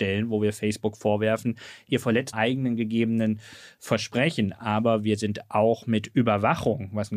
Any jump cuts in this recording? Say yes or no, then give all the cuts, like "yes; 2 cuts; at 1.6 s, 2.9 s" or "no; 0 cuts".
yes; 1 cut; at 2.3 s